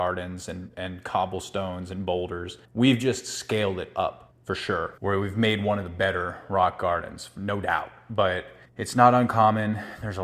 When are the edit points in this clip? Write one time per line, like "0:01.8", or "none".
0:02.6
0:04.3
0:05.0
0:08.7